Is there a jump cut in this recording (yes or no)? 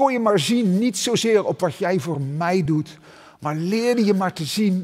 no